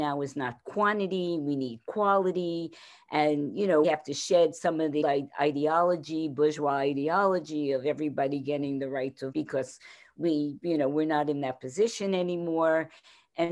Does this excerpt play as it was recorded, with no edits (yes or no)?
no